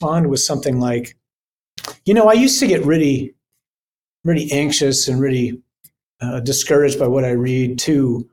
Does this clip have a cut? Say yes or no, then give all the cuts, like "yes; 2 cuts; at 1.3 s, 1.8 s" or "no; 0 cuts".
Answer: no; 0 cuts